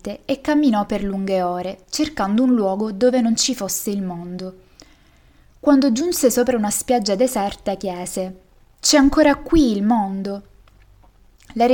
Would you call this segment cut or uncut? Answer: uncut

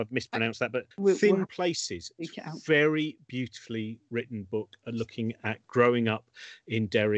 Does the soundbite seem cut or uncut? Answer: cut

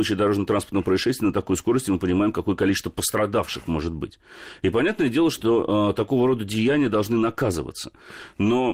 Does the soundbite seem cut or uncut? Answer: uncut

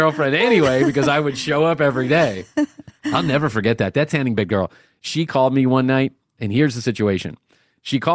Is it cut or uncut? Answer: uncut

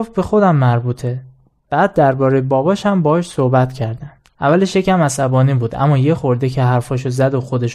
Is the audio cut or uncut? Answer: cut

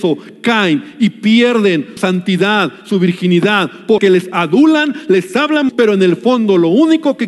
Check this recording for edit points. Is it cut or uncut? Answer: cut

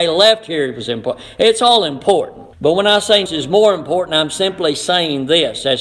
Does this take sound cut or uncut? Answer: cut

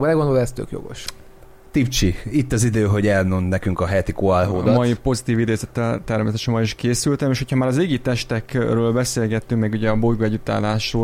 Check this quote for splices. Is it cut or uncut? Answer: uncut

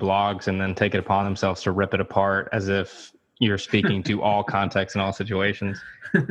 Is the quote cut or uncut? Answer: uncut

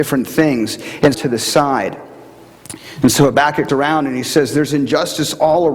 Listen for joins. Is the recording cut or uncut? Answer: cut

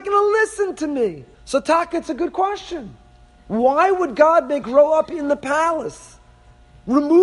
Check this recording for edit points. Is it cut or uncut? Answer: cut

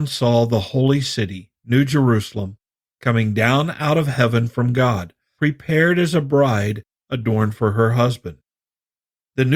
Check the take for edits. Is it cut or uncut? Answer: cut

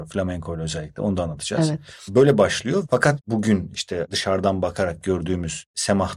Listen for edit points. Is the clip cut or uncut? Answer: cut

